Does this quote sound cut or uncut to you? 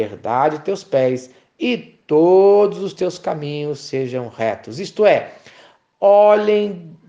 uncut